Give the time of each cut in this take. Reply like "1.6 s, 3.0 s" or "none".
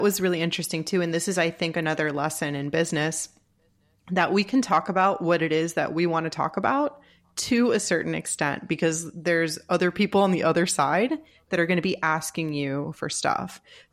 none